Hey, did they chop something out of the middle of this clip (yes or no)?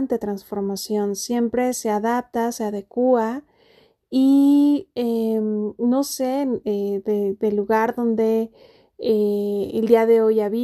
no